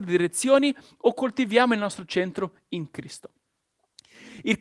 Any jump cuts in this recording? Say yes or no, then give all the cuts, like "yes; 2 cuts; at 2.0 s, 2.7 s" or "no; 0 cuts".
no; 0 cuts